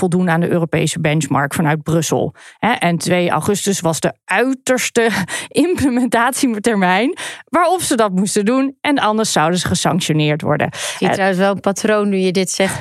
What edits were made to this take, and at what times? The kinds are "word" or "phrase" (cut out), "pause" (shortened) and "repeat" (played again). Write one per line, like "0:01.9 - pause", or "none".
none